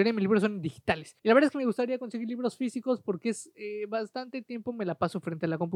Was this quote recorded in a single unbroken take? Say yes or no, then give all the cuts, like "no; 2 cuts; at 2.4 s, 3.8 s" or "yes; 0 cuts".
no; 1 cut; at 1.2 s